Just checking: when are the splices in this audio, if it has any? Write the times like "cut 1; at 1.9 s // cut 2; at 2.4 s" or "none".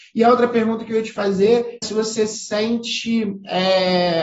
cut 1; at 1.8 s